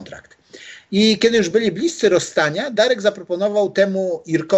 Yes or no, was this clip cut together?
no